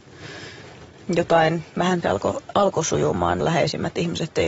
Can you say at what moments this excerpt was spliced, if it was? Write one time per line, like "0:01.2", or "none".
0:02.0
0:02.5
0:03.4